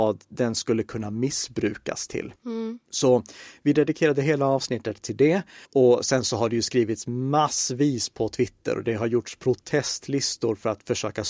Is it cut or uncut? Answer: cut